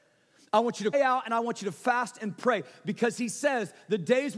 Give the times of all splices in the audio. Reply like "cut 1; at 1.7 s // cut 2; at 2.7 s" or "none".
cut 1; at 0.9 s